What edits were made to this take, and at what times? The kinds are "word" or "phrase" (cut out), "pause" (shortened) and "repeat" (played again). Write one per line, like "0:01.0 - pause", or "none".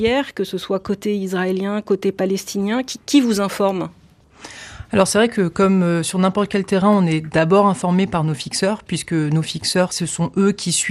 none